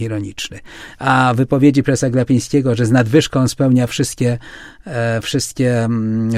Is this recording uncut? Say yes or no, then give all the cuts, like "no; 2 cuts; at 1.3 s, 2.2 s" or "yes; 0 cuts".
yes; 0 cuts